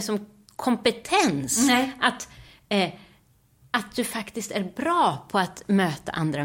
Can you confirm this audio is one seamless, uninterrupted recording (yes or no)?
yes